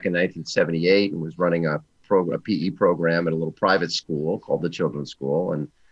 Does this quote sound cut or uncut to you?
uncut